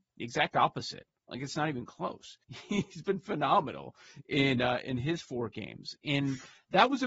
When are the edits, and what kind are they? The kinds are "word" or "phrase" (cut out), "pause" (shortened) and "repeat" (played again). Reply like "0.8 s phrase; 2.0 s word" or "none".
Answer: 2.4 s pause